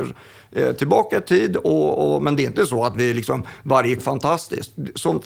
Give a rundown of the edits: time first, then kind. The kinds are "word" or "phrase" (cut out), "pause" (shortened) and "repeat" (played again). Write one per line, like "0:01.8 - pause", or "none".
0:04.0 - phrase